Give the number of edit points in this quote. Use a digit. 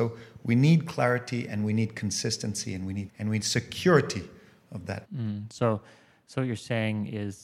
3